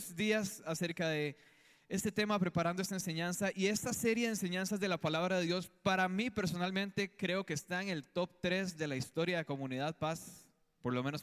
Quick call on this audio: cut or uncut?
uncut